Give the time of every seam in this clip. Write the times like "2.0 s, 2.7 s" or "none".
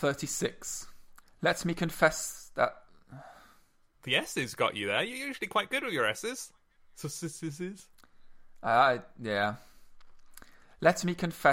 none